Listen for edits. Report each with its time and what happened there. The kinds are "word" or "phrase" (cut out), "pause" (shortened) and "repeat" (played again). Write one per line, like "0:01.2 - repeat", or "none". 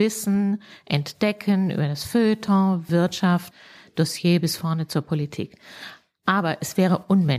none

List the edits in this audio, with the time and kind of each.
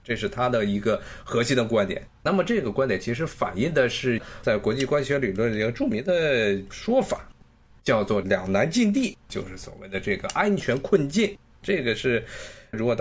0:02.2 - pause
0:09.2 - pause
0:11.5 - pause

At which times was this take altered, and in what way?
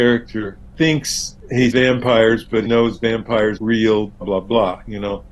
0:01.7 - word
0:02.7 - word
0:03.6 - word
0:04.2 - word

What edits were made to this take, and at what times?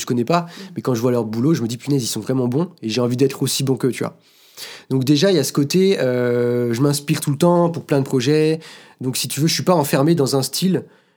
none

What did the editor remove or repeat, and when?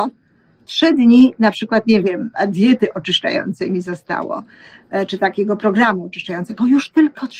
none

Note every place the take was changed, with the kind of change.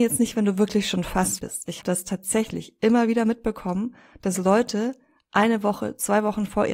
0:01.4 - word
0:01.8 - word

